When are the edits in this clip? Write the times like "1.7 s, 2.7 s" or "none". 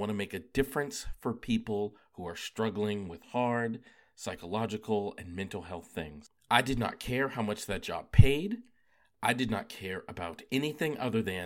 none